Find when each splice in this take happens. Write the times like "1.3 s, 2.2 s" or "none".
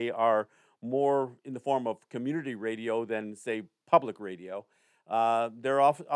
none